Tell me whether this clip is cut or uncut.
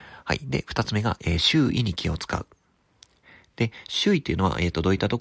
uncut